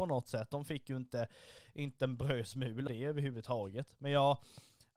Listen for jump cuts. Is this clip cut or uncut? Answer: cut